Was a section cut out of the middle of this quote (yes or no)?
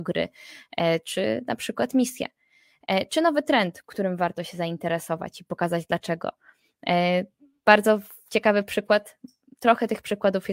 no